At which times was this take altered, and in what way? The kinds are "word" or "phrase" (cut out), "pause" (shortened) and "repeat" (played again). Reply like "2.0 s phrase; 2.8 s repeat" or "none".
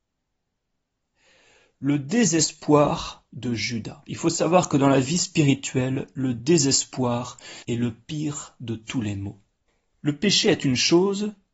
7.6 s pause; 9.7 s pause